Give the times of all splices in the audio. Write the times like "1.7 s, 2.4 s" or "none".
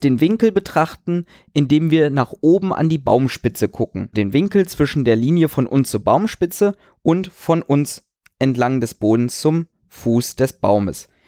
4.1 s